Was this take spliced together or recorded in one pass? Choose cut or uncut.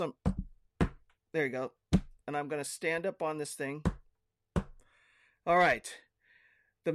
uncut